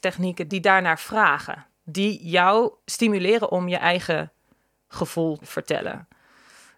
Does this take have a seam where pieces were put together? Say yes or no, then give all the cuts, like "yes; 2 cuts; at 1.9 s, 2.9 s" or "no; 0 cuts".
yes; 3 cuts; at 1.7 s, 2.8 s, 5.4 s